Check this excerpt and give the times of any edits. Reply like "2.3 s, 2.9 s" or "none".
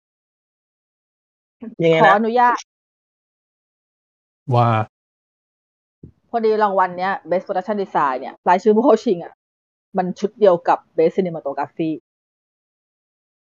1.7 s, 8.4 s